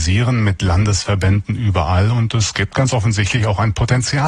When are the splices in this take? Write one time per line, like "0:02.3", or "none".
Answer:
none